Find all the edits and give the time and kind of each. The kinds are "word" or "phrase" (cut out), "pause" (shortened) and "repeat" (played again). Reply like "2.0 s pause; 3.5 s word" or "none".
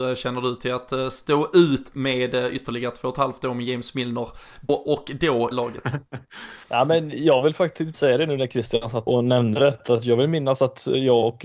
4.7 s word; 5.5 s word; 6.6 s pause; 7.9 s word; 9.1 s word